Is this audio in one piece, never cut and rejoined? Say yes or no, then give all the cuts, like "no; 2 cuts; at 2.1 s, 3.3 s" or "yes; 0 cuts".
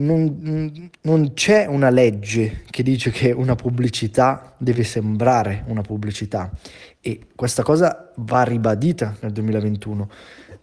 yes; 0 cuts